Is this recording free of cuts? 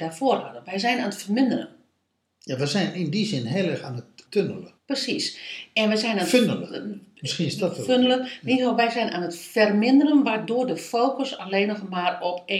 no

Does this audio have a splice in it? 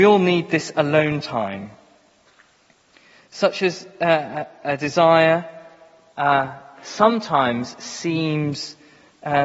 no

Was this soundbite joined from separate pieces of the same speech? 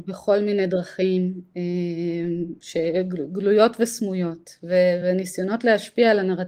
no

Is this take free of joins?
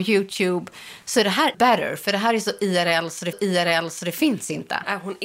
no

